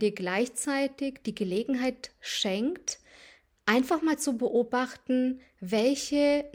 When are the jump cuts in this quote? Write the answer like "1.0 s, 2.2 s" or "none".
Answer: none